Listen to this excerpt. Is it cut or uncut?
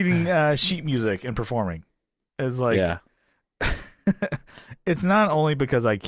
uncut